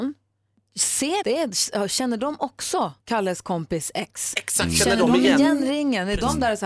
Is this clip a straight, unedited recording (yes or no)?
no